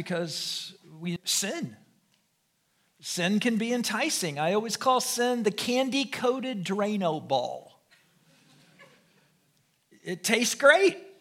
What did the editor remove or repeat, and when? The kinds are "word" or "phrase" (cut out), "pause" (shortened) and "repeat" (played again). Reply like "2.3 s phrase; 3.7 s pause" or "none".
1.2 s word